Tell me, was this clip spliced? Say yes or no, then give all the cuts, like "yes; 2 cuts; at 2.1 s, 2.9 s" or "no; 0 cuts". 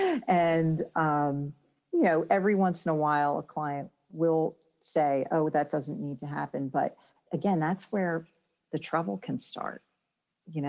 no; 0 cuts